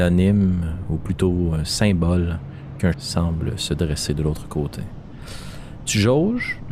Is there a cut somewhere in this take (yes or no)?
yes